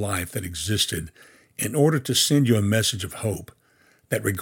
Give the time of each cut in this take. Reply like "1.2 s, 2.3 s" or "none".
none

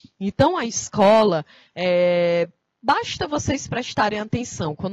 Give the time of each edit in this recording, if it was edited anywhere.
none

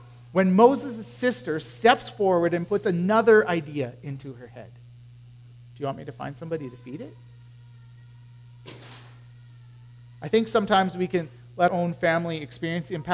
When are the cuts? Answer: 11.7 s

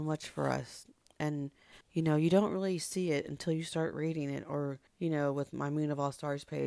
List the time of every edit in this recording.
1.8 s, 4.9 s

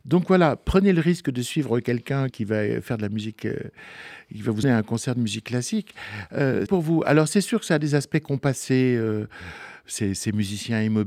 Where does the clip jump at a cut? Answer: 2.3 s, 4.6 s, 6.7 s

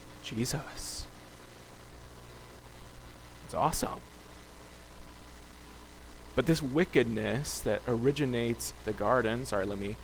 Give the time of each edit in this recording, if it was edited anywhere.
8.8 s

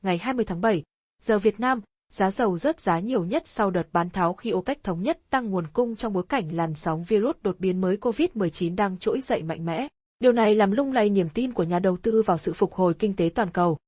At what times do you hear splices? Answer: none

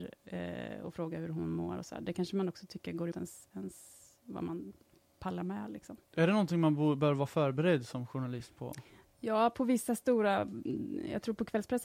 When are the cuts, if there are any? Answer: 3.1 s

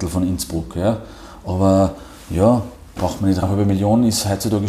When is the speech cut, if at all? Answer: 3.4 s

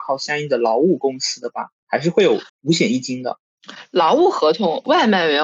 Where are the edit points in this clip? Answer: 2.5 s

